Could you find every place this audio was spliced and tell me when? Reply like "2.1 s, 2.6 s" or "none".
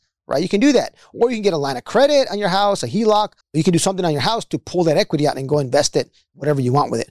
3.4 s